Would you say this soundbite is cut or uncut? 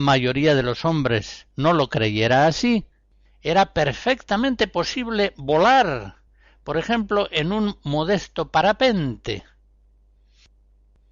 uncut